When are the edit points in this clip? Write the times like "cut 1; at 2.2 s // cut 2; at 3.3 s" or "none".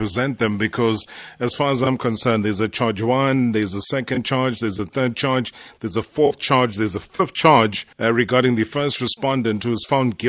cut 1; at 7.9 s